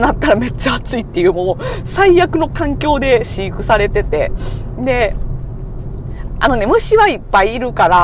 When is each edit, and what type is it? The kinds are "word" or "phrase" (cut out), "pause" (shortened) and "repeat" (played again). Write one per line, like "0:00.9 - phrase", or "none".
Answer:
none